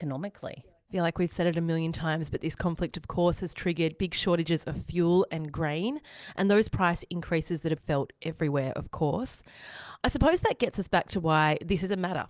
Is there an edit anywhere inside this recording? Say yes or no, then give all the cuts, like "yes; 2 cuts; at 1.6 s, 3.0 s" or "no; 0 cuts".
yes; 1 cut; at 7.8 s